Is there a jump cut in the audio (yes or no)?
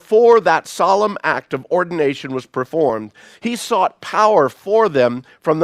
no